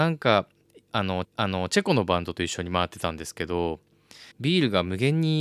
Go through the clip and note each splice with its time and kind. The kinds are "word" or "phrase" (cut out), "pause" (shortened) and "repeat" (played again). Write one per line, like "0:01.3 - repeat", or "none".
0:01.2 - repeat
0:04.3 - pause

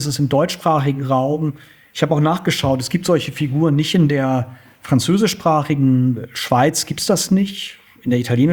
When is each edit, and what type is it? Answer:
none

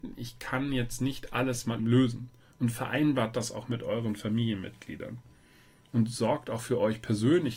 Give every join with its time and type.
0:01.8 - word

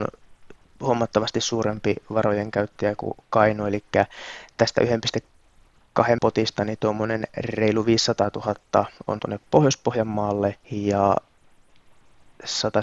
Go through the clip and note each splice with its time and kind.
0:06.2 - word
0:09.2 - word
0:10.6 - pause

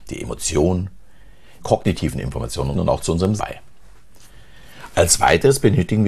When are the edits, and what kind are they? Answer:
0:01.6 - phrase
0:02.7 - phrase
0:03.4 - word

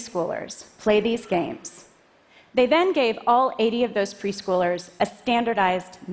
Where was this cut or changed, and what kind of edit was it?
none

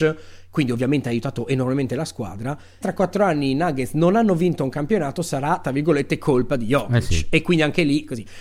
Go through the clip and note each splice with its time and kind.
0:02.8 - word

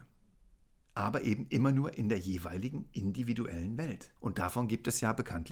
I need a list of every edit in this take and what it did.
0:04.2 - pause

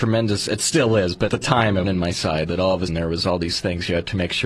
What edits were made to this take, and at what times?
0:01.3 - word
0:01.8 - phrase
0:02.9 - word

